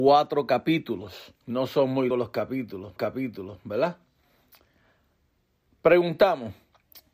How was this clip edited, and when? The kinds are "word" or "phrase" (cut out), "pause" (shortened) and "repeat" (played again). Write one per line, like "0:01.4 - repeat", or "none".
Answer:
0:01.4 - pause
0:02.1 - word
0:03.0 - repeat